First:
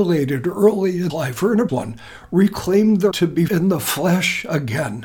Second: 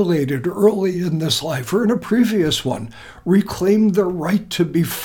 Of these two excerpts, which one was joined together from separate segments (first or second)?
first